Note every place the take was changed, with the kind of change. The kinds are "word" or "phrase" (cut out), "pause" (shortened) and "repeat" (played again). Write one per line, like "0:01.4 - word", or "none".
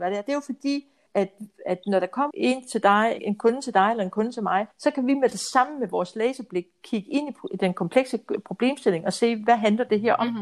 0:01.1 - word
0:02.3 - word
0:03.2 - word
0:04.7 - pause